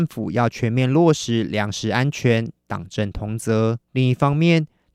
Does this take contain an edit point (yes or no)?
yes